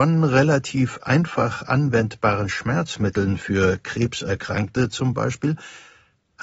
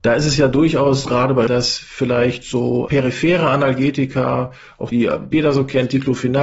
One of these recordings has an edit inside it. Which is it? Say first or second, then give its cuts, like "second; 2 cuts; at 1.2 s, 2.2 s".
second; 4 cuts; at 1.1 s, 1.5 s, 4.9 s, 5.3 s